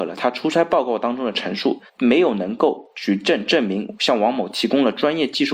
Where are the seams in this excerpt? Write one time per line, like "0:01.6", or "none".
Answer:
0:01.9